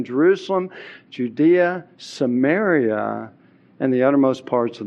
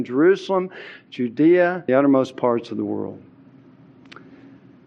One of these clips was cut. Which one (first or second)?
second